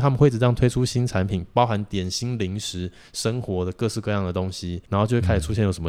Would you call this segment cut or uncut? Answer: cut